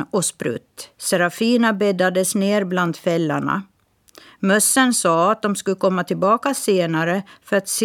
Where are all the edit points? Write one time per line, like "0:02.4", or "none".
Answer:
0:00.9